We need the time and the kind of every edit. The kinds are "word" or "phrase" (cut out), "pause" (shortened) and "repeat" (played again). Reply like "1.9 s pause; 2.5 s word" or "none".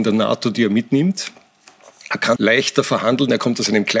2.4 s word